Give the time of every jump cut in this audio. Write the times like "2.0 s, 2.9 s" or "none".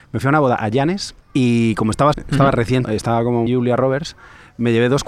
1.2 s, 2.1 s, 2.8 s, 3.5 s